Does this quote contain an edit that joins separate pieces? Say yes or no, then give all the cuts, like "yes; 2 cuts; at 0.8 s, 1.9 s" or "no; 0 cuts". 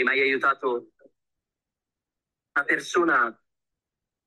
no; 0 cuts